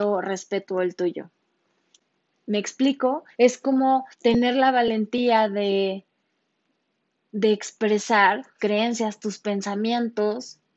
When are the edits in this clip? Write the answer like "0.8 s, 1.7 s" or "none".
3.3 s, 4.1 s, 8.6 s